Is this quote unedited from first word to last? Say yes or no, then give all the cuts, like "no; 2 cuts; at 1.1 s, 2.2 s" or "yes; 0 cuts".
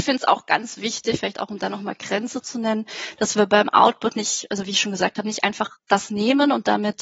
yes; 0 cuts